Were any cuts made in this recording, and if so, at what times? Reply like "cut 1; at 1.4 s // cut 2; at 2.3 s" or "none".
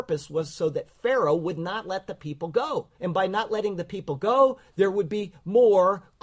cut 1; at 2.9 s